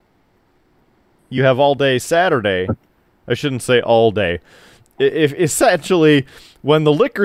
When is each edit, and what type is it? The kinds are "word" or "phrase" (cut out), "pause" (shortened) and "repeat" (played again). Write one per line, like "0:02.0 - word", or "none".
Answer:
none